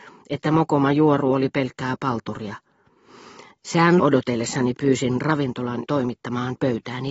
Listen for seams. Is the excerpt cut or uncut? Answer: cut